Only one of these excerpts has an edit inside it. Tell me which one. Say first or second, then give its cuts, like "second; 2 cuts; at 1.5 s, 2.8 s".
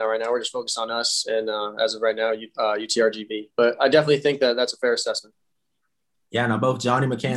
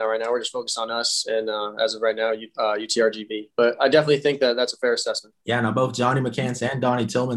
second; 1 cut; at 5.4 s